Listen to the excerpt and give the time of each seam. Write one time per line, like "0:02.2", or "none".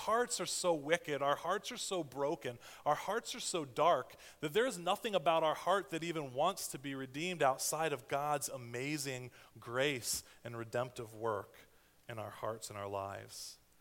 none